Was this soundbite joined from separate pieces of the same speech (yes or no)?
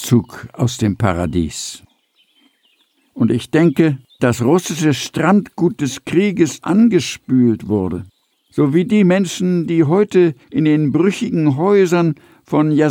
yes